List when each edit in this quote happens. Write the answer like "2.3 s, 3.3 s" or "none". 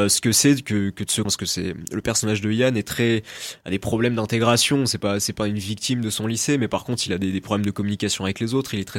1.2 s